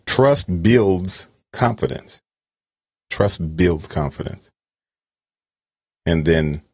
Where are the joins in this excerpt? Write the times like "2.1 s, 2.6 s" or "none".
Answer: none